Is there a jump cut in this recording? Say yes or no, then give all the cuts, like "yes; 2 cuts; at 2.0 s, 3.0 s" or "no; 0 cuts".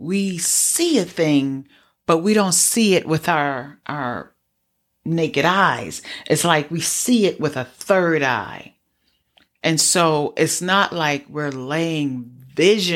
no; 0 cuts